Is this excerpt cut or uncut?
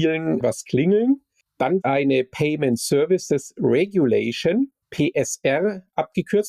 cut